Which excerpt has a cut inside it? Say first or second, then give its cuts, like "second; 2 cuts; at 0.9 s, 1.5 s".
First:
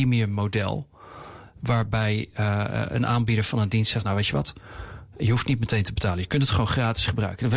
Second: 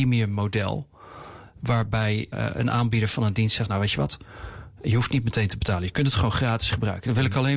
second; 1 cut; at 2.3 s